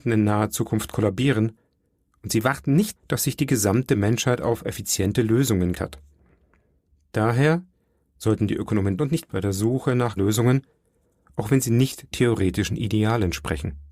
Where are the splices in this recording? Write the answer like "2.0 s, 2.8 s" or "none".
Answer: 3.0 s, 5.7 s, 9.0 s, 9.3 s, 10.2 s, 12.1 s